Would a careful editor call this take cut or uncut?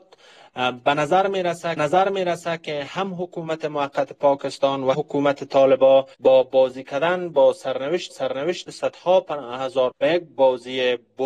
cut